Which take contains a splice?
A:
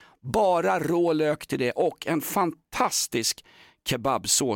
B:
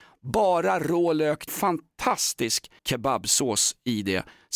B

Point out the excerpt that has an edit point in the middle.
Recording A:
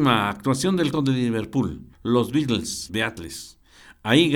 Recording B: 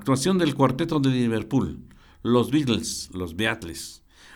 A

